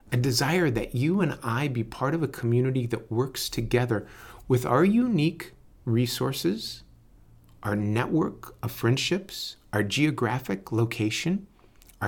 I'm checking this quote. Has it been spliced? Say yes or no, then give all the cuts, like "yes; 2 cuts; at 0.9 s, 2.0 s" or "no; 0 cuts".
no; 0 cuts